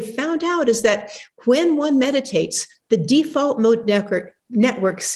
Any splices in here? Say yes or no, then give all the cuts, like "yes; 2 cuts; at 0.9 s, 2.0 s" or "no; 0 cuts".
no; 0 cuts